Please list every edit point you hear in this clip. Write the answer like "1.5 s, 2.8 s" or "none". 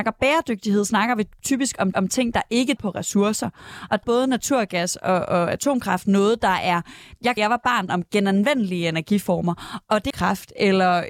1.9 s, 2.8 s, 4.0 s, 7.4 s, 7.9 s, 10.1 s